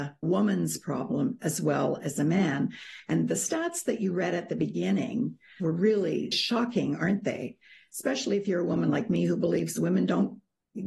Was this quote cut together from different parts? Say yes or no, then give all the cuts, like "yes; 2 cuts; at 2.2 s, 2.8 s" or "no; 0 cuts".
no; 0 cuts